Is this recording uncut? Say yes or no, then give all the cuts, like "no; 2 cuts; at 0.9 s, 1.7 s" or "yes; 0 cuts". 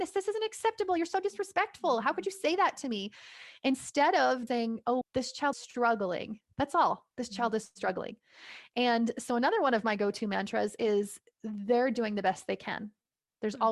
no; 4 cuts; at 4.5 s, 5.0 s, 5.5 s, 7.1 s